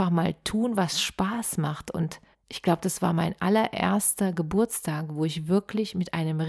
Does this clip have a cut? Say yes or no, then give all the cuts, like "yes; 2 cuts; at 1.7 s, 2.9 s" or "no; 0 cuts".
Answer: yes; 1 cut; at 2.3 s